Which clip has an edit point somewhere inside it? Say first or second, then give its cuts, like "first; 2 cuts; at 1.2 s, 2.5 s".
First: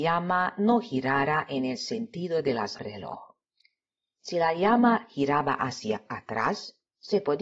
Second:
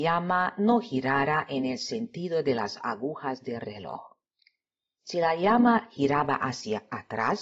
first; 1 cut; at 2.8 s